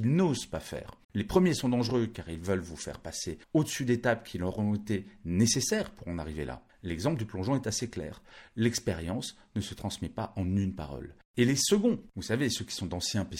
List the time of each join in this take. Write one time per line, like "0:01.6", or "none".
0:01.0
0:03.4
0:06.7
0:11.2